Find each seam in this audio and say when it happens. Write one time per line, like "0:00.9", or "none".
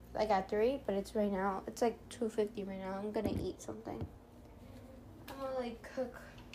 0:02.0